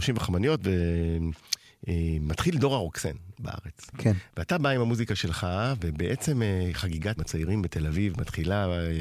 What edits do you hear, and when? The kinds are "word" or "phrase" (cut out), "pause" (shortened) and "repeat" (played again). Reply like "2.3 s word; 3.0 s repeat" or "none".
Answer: 7.2 s word